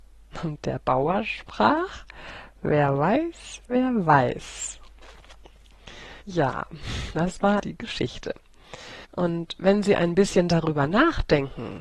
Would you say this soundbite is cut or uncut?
cut